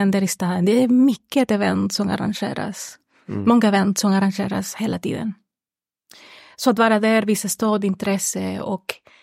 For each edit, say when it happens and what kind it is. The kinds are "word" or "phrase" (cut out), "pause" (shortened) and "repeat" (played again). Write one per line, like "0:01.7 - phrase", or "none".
none

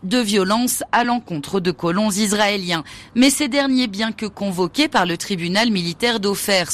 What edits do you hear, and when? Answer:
none

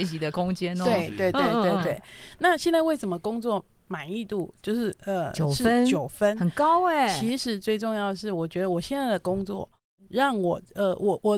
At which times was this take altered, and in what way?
none

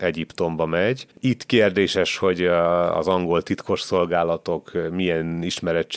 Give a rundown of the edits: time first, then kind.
0:01.1 - pause

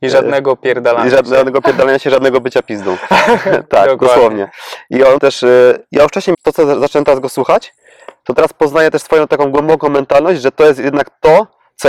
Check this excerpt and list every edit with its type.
0:05.2 - word
0:06.3 - word

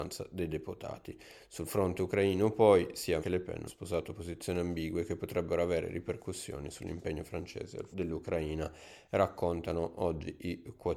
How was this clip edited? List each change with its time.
0:03.2 - word
0:03.7 - word
0:07.9 - word

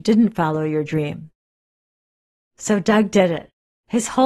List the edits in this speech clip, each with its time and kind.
none

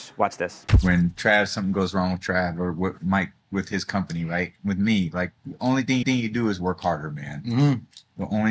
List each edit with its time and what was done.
0:05.4 - pause
0:06.0 - repeat

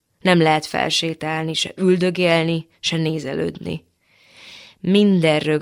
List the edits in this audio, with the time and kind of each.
none

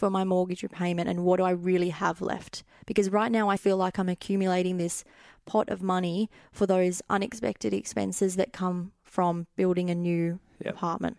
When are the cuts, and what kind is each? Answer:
0:03.6 - word

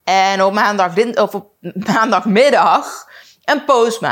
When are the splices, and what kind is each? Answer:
none

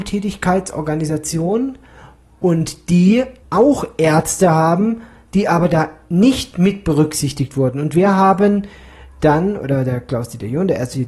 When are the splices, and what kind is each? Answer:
0:03.4 - word

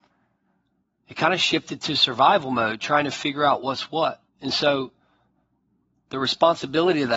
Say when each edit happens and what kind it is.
0:04.3 - pause

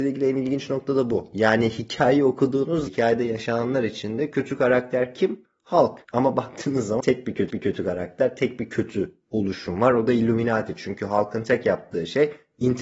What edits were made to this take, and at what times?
0:02.9 - phrase
0:06.0 - pause
0:07.0 - word
0:07.5 - repeat

